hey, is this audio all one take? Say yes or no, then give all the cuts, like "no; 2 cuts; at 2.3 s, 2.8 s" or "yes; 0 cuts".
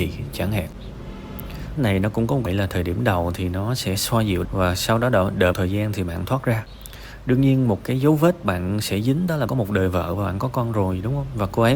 no; 5 cuts; at 1.8 s, 2.5 s, 4.4 s, 5.5 s, 9.5 s